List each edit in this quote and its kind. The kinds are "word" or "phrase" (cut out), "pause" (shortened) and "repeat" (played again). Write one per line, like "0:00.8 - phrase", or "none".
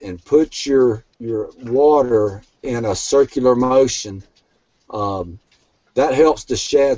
0:01.1 - pause